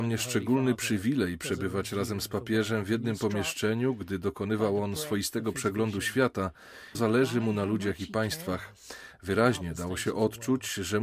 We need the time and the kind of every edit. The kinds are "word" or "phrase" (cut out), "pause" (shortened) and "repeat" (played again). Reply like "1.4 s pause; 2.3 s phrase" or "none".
6.9 s phrase